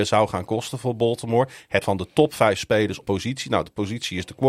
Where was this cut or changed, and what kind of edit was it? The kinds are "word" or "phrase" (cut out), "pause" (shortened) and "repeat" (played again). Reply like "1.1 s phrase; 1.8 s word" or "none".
1.8 s word; 3.0 s phrase